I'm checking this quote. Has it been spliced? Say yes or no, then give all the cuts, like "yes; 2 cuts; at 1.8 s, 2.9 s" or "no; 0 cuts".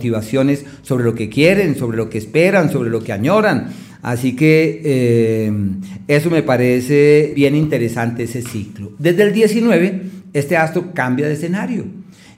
yes; 1 cut; at 7.3 s